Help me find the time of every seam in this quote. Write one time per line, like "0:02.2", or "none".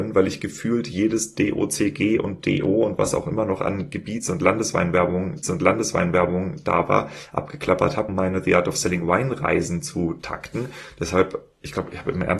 0:05.4
0:08.1